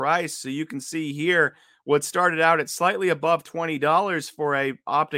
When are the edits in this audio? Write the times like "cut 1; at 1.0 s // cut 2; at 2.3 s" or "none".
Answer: none